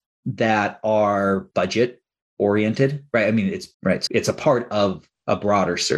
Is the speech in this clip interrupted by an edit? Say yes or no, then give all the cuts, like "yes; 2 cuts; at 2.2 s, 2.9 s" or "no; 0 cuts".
yes; 3 cuts; at 1.5 s, 3.7 s, 4.1 s